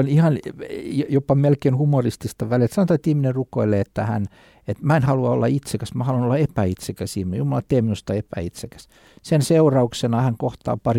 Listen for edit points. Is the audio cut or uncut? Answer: cut